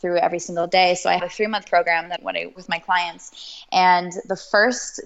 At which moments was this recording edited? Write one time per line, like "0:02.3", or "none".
0:01.2
0:01.7
0:02.2
0:02.6